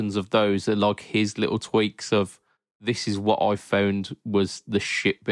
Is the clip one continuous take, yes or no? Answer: yes